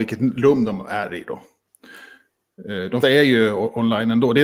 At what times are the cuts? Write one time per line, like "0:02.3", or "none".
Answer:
0:03.0